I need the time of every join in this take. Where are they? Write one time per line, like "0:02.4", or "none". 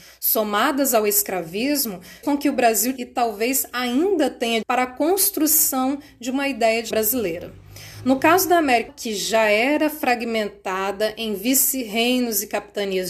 0:02.2
0:03.0
0:04.6
0:06.9
0:08.9

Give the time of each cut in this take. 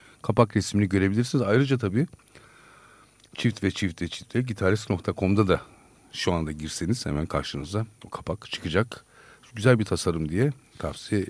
none

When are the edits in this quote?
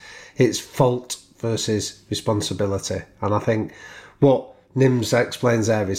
none

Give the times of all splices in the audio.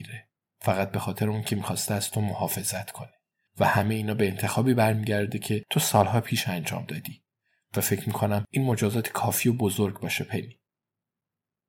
none

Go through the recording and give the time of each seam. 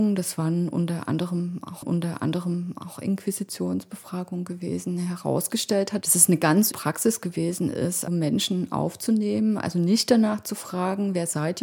0:01.8
0:06.7
0:08.1

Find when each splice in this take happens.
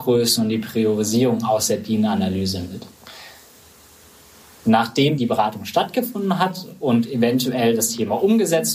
0:05.2

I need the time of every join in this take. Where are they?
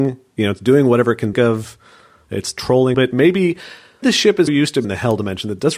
0:01.3
0:02.9
0:04.0
0:04.5
0:04.8

